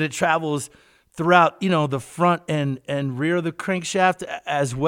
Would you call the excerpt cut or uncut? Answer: uncut